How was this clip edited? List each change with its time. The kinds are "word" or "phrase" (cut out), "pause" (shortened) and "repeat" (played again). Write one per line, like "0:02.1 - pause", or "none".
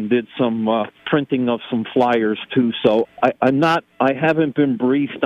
0:01.0 - pause
0:03.0 - word